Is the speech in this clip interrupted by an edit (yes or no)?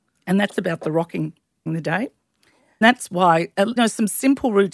yes